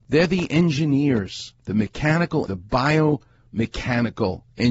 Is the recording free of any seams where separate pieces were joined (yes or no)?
no